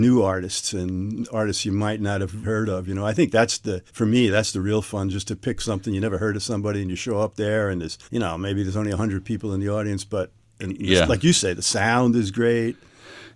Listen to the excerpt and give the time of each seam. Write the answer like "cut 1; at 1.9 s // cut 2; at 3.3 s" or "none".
cut 1; at 2.4 s // cut 2; at 3.9 s // cut 3; at 8.0 s